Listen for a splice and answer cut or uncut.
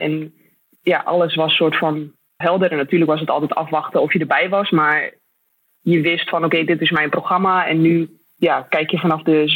cut